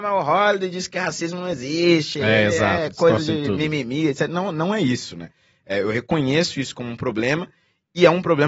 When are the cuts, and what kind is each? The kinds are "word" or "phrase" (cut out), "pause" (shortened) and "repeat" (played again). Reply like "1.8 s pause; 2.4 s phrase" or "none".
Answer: none